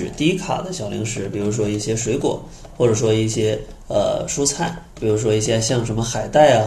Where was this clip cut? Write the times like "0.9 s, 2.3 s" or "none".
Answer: 4.9 s